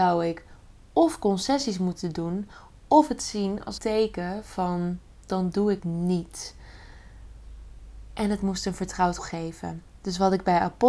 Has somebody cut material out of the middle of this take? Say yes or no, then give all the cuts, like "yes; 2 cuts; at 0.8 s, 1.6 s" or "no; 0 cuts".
yes; 3 cuts; at 3.8 s, 5.8 s, 9.2 s